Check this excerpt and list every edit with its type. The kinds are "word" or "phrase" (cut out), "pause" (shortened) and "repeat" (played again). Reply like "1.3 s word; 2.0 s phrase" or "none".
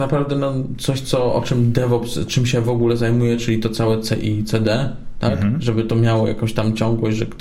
none